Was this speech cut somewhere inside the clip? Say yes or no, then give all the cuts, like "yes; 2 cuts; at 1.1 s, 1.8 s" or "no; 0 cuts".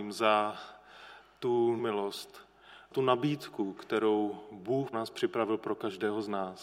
yes; 3 cuts; at 1.8 s, 2.9 s, 4.9 s